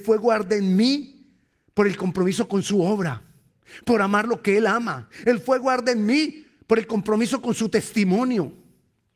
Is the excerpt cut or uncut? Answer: uncut